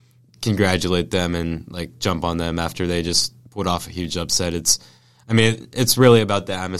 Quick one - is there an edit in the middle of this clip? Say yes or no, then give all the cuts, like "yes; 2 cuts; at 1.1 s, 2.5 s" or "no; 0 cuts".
no; 0 cuts